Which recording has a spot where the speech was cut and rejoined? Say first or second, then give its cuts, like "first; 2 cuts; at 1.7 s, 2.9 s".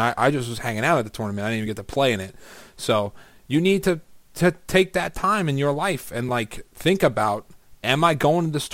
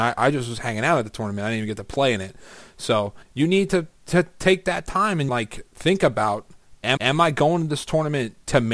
second; 4 cuts; at 3.2 s, 4.0 s, 5.3 s, 7.0 s